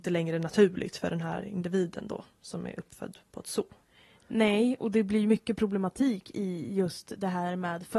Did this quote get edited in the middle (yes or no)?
no